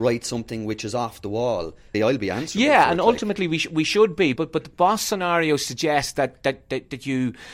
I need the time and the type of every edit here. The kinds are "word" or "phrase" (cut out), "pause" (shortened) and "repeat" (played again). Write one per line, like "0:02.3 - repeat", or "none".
0:01.9 - word
0:04.4 - word

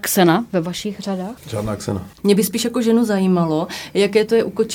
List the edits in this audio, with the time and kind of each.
none

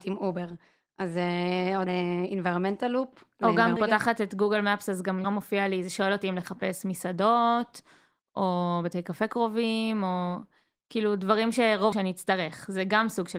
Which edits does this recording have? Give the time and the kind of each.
0:01.9 - word
0:03.8 - word
0:05.2 - word
0:11.9 - word

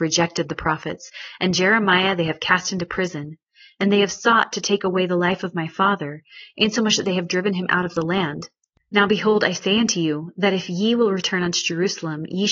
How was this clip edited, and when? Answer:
none

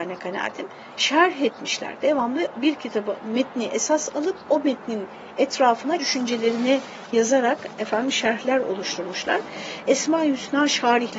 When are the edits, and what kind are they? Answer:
0:06.0 - word

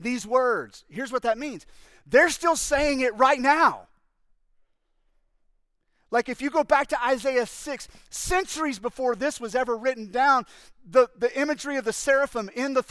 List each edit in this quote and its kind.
none

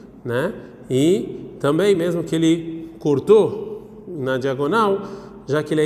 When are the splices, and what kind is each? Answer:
none

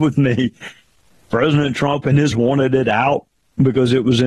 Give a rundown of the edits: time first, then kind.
0:02.3 - word

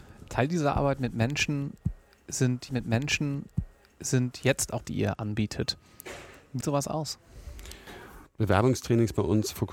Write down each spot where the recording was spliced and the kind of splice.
0:02.7 - repeat
0:04.8 - word
0:06.6 - word
0:08.3 - pause

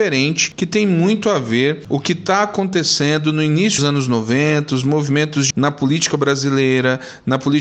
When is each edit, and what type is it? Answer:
0:01.9 - word
0:03.8 - word
0:05.5 - word

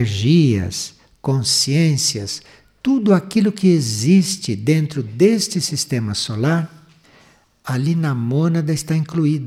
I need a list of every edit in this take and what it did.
none

